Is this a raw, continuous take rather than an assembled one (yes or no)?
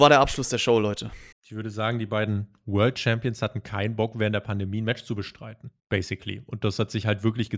no